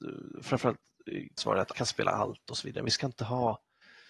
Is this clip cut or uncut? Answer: cut